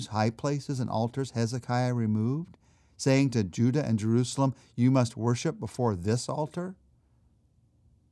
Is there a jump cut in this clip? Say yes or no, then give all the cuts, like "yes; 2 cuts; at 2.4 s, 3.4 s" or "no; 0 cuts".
no; 0 cuts